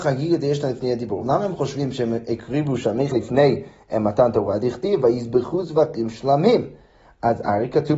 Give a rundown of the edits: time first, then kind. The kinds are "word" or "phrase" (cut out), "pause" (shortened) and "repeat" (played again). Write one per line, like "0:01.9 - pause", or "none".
0:03.1 - word